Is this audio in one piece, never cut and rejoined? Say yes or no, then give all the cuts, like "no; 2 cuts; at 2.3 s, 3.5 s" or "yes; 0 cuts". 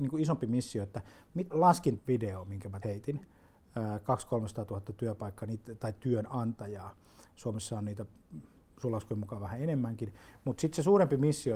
no; 3 cuts; at 1.5 s, 2.0 s, 2.8 s